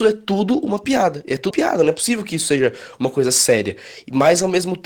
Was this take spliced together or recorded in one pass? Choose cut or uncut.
cut